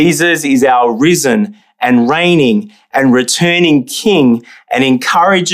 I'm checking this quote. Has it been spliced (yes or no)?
no